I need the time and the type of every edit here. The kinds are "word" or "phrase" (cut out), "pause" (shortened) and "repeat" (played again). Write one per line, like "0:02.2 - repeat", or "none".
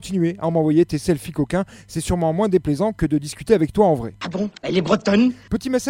0:04.6 - pause